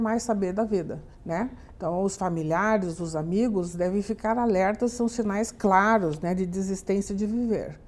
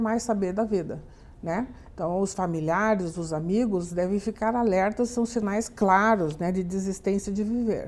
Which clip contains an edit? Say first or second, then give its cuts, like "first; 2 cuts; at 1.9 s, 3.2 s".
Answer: first; 1 cut; at 1.1 s